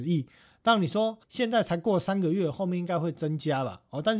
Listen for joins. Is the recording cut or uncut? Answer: cut